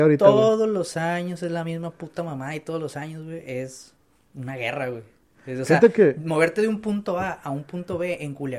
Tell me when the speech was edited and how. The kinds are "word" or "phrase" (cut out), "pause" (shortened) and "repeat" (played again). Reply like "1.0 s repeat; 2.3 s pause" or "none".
none